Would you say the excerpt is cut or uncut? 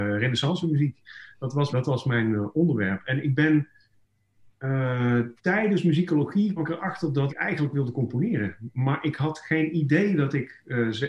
cut